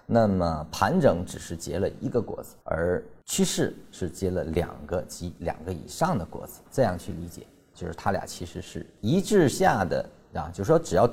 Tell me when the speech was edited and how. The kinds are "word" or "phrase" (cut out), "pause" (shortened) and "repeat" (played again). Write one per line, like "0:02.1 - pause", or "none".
0:02.6 - pause